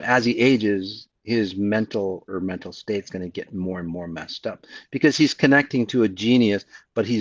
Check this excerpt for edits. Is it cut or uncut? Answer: cut